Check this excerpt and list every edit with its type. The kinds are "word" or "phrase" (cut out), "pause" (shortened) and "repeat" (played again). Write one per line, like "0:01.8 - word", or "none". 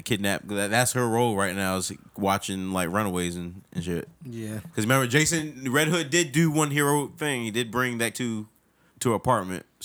0:04.1 - pause
0:08.1 - word
0:08.9 - word